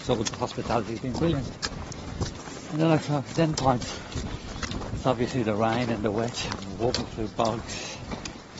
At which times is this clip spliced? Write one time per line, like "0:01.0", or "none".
0:03.5